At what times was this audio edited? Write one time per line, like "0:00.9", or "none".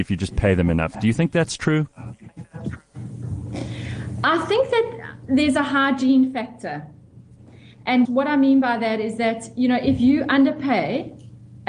0:08.0